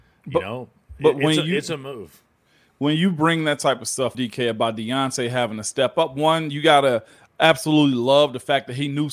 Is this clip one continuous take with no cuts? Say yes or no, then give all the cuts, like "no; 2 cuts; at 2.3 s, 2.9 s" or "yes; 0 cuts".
no; 1 cut; at 4.1 s